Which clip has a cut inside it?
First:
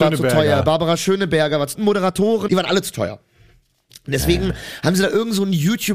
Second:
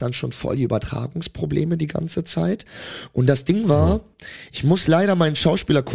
first; 2 cuts; at 1.7 s, 2.5 s

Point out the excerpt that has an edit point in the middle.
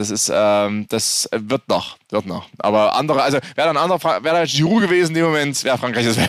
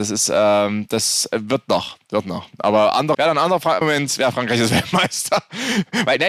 second; 2 cuts; at 3.1 s, 3.8 s

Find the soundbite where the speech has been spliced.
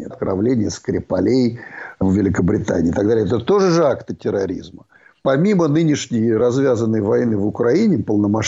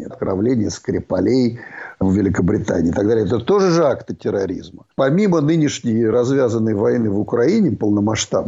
second; 1 cut; at 4.9 s

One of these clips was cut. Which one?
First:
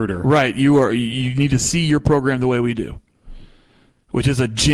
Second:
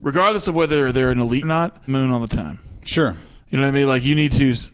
second; 2 cuts; at 1.4 s, 1.9 s

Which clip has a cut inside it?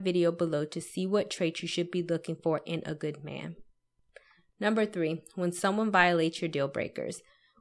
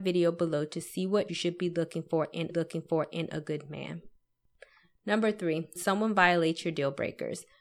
second; 3 cuts; at 1.3 s, 2.5 s, 5.8 s

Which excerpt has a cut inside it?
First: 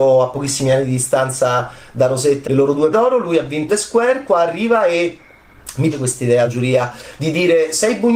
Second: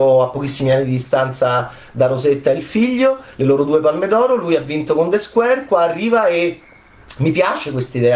first; 5 cuts; at 2.4 s, 2.9 s, 3.7 s, 5.9 s, 6.5 s

